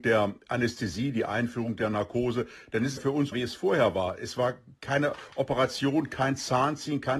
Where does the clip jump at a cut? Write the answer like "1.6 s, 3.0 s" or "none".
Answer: 3.0 s, 3.3 s